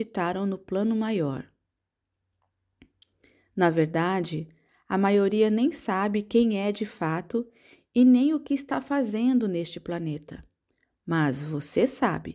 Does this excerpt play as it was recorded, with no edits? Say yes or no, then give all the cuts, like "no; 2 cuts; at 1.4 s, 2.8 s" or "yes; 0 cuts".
yes; 0 cuts